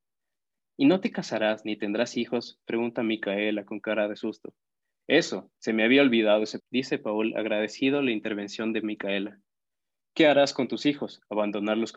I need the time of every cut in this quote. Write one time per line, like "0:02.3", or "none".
0:05.5
0:06.6